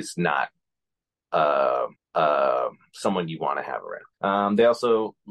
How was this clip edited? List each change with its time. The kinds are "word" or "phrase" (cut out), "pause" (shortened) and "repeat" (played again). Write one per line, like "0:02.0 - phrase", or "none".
0:02.0 - repeat
0:04.1 - pause